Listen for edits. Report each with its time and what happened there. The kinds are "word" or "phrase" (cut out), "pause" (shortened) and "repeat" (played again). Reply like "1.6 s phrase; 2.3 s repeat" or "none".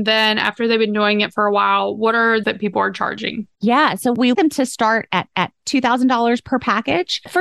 2.4 s phrase; 3.5 s pause; 4.3 s word; 5.3 s repeat